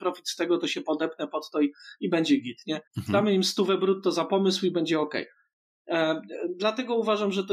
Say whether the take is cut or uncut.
cut